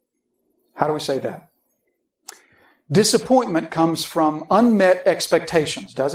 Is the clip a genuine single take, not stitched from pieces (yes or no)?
yes